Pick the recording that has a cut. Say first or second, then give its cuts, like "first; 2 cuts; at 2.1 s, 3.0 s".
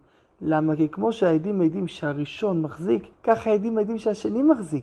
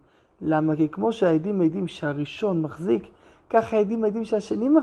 first; 1 cut; at 3.1 s